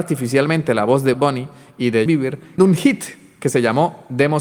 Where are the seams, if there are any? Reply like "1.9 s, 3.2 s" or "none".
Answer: 1.1 s, 2.1 s, 2.6 s